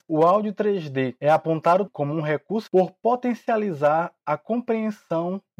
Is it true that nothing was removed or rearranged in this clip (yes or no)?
no